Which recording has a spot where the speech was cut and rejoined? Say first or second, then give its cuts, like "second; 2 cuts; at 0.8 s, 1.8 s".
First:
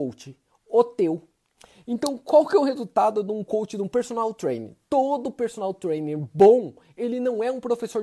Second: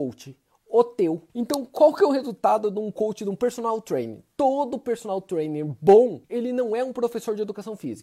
second; 2 cuts; at 1.3 s, 6.2 s